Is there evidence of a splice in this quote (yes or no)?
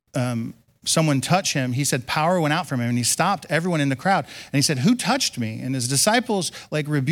no